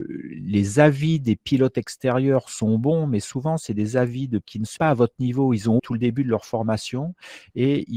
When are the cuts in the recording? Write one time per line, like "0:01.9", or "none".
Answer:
0:04.4
0:04.8
0:05.8